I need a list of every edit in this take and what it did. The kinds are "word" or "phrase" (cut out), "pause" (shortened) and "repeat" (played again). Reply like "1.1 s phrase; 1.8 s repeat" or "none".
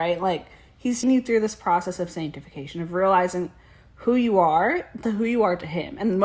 1.0 s word; 5.0 s word